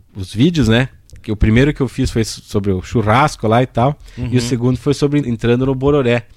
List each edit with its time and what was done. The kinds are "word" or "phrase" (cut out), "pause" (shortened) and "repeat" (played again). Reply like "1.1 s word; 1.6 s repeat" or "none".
5.2 s word